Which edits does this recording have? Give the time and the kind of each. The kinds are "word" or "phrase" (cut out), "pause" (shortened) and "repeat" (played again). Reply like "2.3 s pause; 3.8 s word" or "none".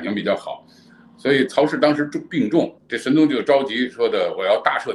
2.8 s pause

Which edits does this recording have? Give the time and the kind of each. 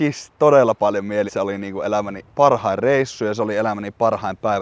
1.3 s word; 2.3 s pause

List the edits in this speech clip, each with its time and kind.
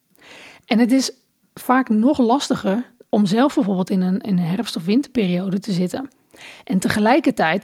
3.1 s word

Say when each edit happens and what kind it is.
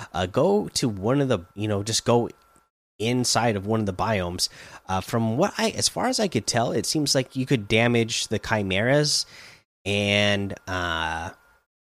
1.5 s pause

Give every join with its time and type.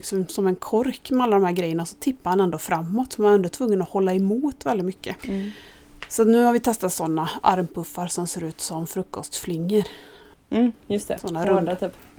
5.2 s pause; 10.8 s pause

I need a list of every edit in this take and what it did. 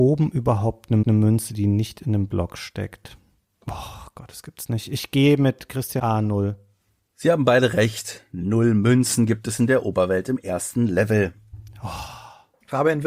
1.0 s repeat; 6.0 s phrase

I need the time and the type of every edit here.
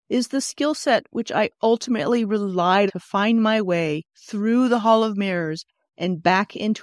2.9 s word

